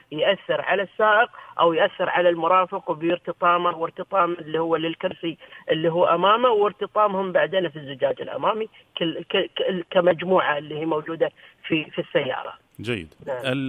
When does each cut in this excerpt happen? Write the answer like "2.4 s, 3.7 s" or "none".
none